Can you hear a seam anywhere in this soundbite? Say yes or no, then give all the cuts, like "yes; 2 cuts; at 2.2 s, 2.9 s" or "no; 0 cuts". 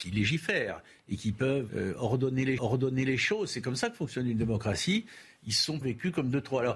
yes; 3 cuts; at 1.7 s, 2.6 s, 5.8 s